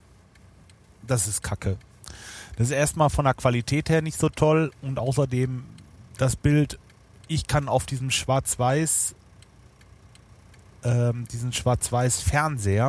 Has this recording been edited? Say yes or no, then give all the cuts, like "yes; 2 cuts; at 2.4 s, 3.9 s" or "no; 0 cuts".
no; 0 cuts